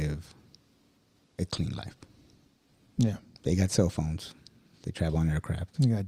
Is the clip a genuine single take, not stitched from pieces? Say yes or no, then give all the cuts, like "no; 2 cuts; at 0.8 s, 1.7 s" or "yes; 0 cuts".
yes; 0 cuts